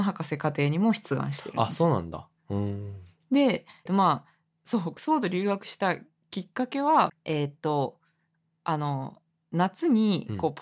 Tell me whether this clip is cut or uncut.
cut